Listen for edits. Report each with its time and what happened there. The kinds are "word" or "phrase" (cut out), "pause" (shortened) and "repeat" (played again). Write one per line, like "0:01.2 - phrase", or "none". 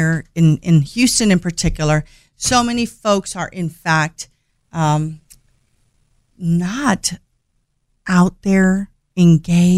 none